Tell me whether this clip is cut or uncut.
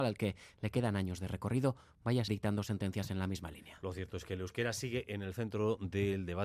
cut